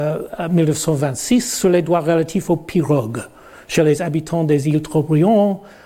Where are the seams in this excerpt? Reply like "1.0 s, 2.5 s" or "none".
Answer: none